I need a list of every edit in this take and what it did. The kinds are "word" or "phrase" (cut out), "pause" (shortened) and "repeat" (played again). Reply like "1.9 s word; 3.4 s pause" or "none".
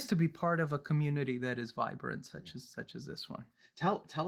none